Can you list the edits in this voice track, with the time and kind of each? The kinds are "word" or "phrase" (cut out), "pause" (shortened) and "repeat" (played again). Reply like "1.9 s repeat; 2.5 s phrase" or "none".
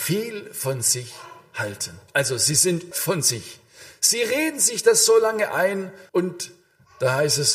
2.1 s pause; 2.9 s word; 6.1 s pause